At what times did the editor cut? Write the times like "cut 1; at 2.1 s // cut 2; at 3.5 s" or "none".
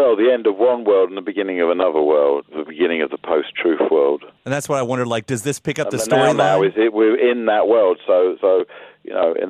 cut 1; at 2.5 s // cut 2; at 8.4 s